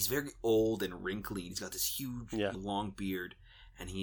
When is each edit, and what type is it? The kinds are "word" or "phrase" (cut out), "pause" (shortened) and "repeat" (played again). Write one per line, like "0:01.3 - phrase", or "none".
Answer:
0:02.5 - word